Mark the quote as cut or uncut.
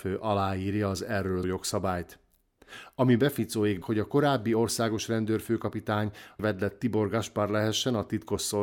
cut